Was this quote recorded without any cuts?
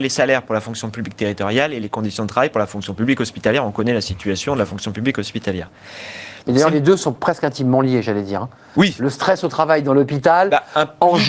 yes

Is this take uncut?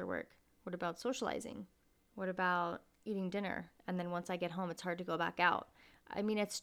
yes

